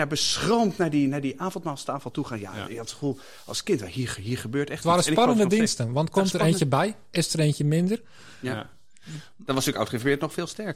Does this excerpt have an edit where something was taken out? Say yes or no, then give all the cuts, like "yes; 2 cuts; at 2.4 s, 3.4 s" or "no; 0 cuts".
no; 0 cuts